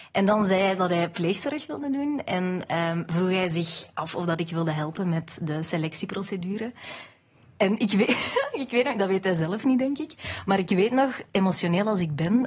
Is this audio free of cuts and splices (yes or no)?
yes